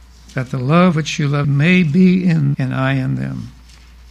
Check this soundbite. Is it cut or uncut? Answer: cut